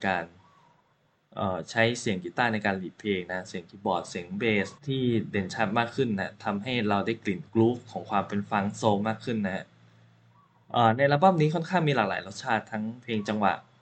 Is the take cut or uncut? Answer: cut